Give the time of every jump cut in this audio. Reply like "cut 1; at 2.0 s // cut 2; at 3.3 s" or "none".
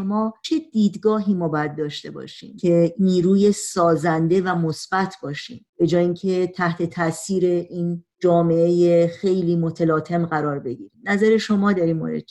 cut 1; at 5.7 s // cut 2; at 8.1 s // cut 3; at 10.9 s